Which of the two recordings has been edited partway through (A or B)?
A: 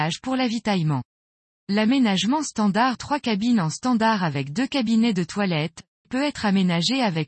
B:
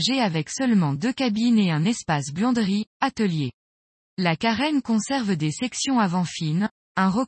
A